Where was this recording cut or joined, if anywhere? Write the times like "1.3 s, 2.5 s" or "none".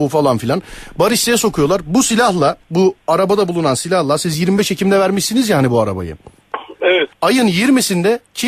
2.6 s, 7.1 s